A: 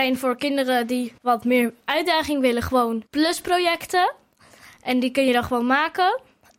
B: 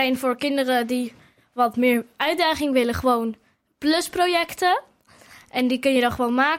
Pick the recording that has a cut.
A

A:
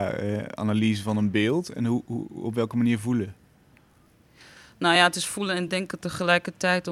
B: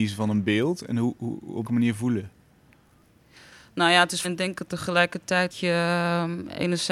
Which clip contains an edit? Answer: B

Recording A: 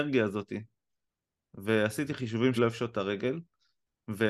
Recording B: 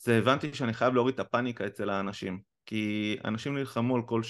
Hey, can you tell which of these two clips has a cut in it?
A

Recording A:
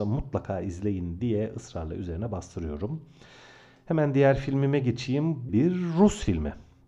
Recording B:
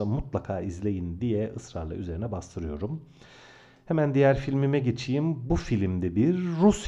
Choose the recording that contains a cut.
A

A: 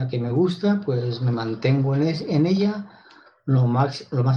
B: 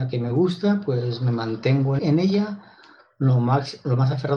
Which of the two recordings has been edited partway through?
B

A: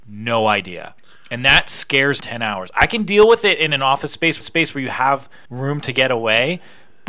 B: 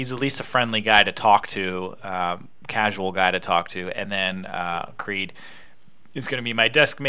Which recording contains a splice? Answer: A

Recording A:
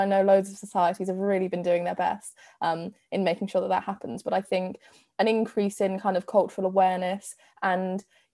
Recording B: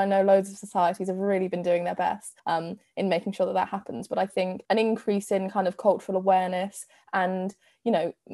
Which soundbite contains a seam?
B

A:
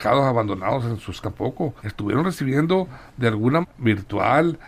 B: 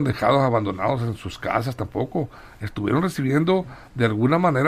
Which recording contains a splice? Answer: A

